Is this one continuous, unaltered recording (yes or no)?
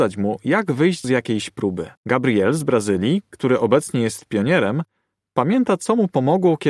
no